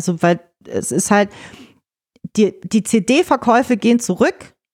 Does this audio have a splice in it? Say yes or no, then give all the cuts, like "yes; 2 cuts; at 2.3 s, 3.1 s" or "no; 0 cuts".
no; 0 cuts